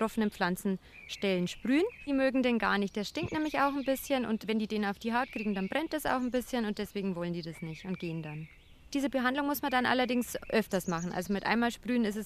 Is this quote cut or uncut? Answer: uncut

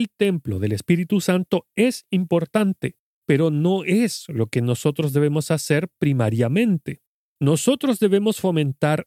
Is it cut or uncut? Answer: uncut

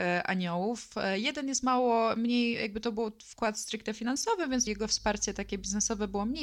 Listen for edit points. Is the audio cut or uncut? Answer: cut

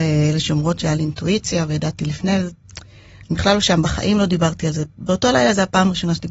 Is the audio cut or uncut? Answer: uncut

